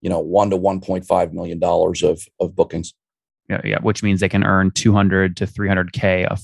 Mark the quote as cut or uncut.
uncut